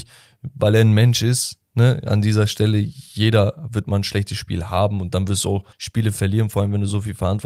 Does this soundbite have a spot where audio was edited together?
yes; 1 cut; at 5.7 s

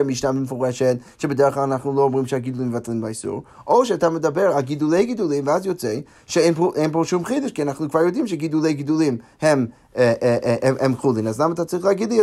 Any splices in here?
no; 0 cuts

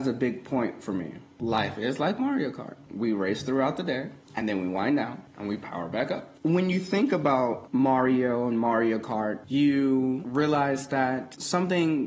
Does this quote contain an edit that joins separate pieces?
no; 0 cuts

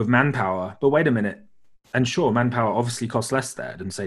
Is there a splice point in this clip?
no; 0 cuts

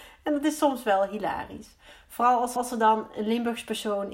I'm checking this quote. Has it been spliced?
yes; 1 cut; at 2.6 s

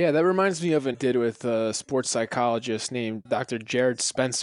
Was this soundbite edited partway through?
yes; 2 cuts; at 0.9 s, 3.2 s

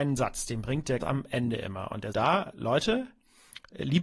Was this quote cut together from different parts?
yes; 3 cuts; at 1.0 s, 2.1 s, 2.5 s

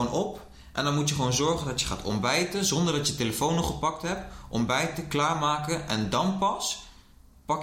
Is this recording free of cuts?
yes; 0 cuts

